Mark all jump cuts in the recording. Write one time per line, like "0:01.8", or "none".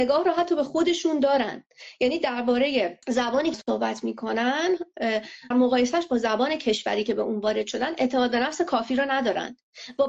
0:03.0
0:03.5
0:05.5

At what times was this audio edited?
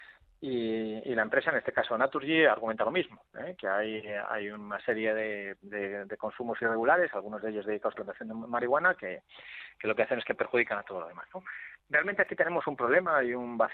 0:07.9
0:11.8

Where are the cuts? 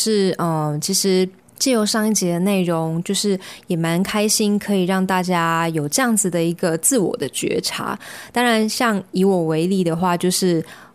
0:01.4

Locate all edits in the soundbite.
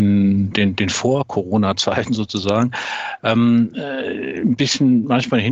none

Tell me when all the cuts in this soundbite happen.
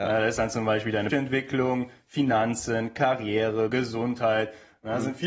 0:01.1
0:03.7

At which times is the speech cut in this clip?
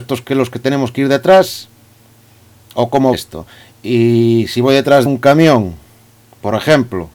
0:03.1
0:05.1

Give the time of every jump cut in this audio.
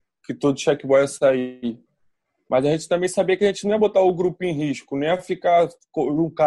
none

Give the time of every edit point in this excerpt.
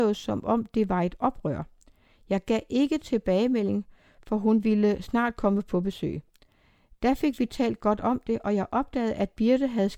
none

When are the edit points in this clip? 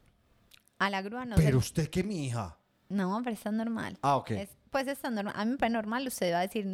none

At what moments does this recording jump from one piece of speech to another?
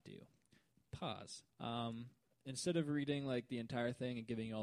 0:01.5

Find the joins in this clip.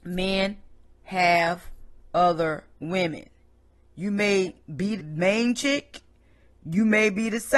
0:02.7
0:05.0

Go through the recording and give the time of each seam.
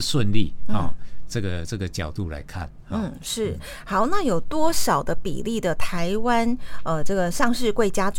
none

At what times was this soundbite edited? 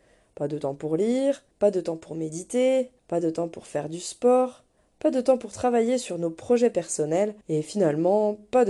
0:01.5
0:03.0
0:04.8
0:07.4

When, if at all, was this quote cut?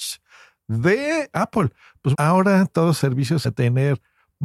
0:01.3
0:02.1
0:03.0
0:03.4

